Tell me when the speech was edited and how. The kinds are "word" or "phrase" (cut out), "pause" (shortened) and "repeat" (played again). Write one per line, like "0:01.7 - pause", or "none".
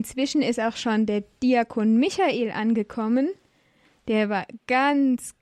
none